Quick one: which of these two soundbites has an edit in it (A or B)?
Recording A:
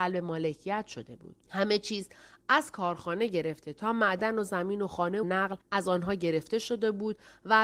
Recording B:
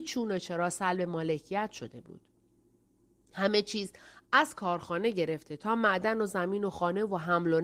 A